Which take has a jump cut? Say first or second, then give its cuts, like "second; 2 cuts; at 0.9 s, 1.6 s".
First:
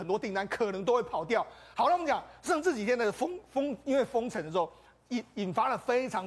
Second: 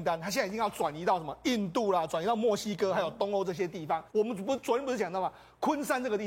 second; 1 cut; at 4.1 s